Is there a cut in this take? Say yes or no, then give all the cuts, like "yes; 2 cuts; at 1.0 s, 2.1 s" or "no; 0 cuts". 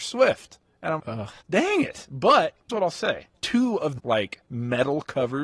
yes; 6 cuts; at 1.0 s, 1.4 s, 2.7 s, 3.3 s, 4.0 s, 4.5 s